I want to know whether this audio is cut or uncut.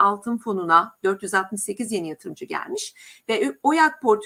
uncut